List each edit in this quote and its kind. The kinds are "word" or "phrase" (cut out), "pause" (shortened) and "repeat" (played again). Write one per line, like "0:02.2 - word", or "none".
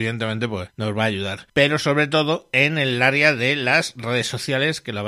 none